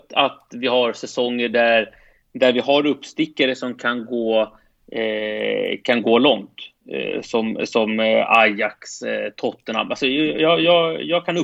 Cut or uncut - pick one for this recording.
uncut